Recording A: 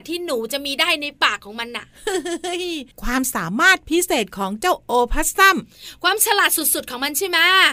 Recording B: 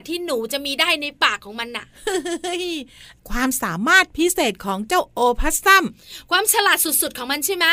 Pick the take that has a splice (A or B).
A